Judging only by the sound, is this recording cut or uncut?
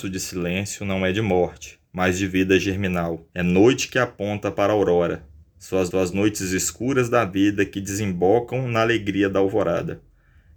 cut